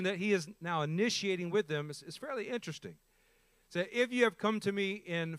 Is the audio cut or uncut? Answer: uncut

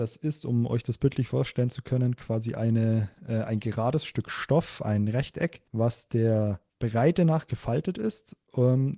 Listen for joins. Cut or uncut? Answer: cut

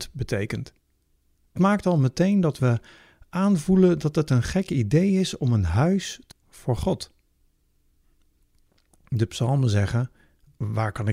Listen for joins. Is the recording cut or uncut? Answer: cut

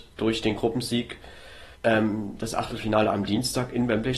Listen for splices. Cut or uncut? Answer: cut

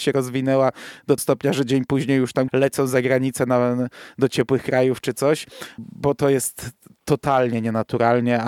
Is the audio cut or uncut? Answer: cut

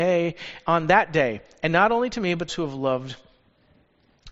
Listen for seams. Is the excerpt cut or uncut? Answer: cut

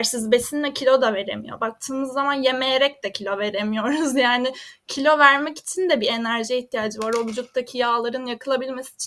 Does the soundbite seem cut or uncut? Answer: uncut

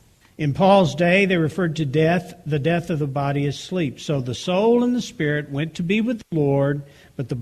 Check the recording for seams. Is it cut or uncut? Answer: uncut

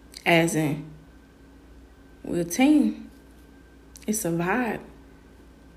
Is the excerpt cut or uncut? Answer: uncut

